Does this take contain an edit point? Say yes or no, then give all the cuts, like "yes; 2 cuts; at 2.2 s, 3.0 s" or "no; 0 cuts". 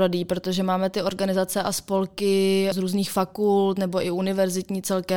yes; 1 cut; at 2.7 s